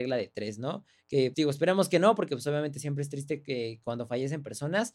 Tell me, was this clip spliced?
yes; 1 cut; at 1.3 s

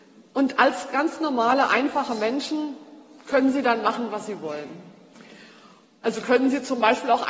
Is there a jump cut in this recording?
no; 0 cuts

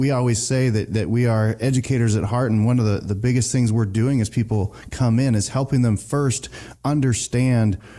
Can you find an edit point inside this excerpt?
no; 0 cuts

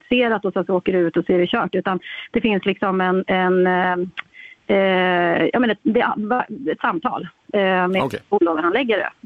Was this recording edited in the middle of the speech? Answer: no; 0 cuts

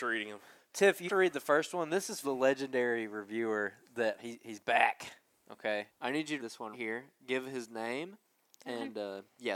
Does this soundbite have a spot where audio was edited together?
yes; 6 cuts; at 1.1 s, 2.2 s, 4.2 s, 5.9 s, 6.4 s, 6.7 s

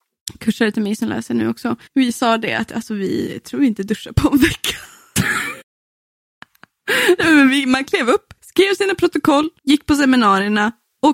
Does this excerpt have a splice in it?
yes; 4 cuts; at 1.9 s, 5.6 s, 8.4 s, 9.6 s

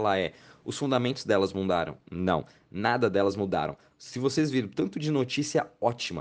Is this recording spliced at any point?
no; 0 cuts

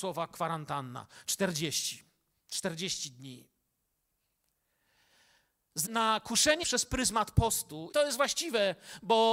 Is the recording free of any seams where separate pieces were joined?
no; 3 cuts; at 5.9 s, 6.6 s, 7.9 s

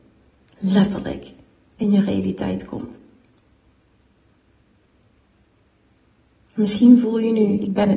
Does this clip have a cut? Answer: no; 0 cuts

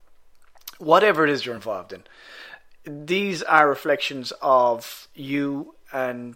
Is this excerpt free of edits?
yes; 0 cuts

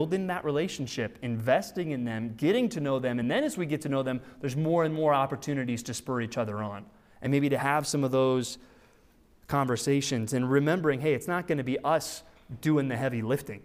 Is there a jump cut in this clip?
no; 0 cuts

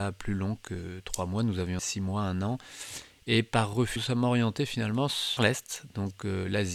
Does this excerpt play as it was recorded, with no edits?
no; 3 cuts; at 1.8 s, 4.0 s, 5.4 s

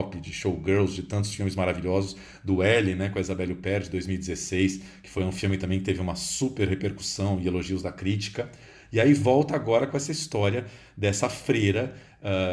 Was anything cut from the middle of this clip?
no; 0 cuts

